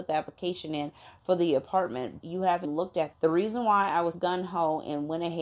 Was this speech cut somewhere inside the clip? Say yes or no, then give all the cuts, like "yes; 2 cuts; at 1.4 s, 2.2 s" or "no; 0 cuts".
yes; 4 cuts; at 2.2 s, 2.6 s, 3.1 s, 4.1 s